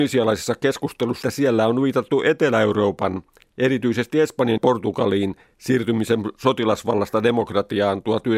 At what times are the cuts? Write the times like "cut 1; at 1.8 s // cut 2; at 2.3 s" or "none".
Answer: cut 1; at 1.2 s // cut 2; at 4.6 s